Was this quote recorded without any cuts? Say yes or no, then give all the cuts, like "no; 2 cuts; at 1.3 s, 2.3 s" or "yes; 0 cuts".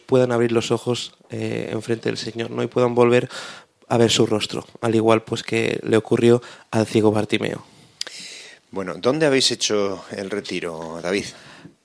yes; 0 cuts